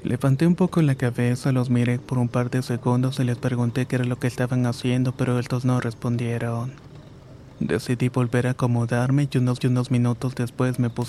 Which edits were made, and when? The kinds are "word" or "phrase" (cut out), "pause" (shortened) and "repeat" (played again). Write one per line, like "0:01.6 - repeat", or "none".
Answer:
0:09.6 - repeat